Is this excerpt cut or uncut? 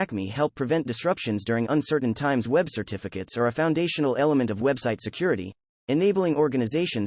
uncut